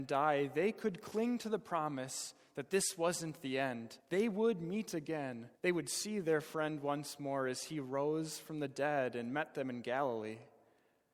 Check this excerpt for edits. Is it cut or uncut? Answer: cut